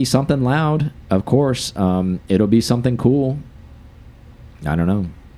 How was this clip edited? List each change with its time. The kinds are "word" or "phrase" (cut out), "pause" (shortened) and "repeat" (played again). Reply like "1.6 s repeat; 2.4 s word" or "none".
none